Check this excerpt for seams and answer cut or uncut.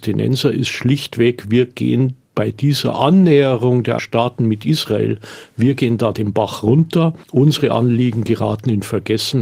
cut